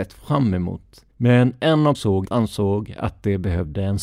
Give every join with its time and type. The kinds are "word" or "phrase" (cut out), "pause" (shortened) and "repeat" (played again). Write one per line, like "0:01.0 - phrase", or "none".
0:01.1 - pause
0:01.9 - phrase
0:02.2 - word